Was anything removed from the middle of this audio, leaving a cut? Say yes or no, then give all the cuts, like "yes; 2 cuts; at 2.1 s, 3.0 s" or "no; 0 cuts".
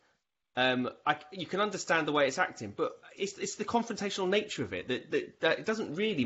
yes; 1 cut; at 3.2 s